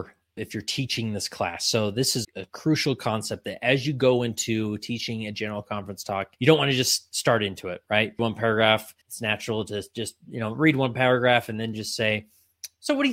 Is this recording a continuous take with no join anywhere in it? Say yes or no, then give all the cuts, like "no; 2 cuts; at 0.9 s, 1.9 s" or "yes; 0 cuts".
no; 4 cuts; at 2.2 s, 6.4 s, 8.2 s, 9.0 s